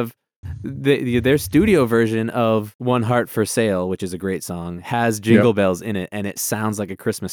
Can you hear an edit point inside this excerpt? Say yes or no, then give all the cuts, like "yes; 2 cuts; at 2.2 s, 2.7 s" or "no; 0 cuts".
no; 0 cuts